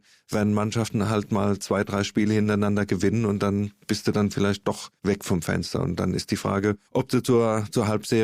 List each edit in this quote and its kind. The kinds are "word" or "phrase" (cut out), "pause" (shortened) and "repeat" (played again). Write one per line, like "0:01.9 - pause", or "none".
0:05.0 - pause
0:06.9 - pause